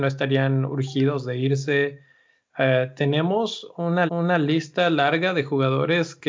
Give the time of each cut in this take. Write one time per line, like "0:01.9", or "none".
0:04.1